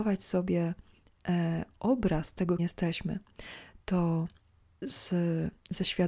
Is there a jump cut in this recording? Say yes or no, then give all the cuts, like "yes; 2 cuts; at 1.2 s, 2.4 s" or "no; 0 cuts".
yes; 2 cuts; at 2.6 s, 4.4 s